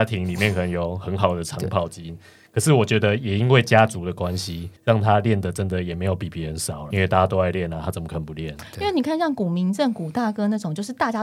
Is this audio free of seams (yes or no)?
no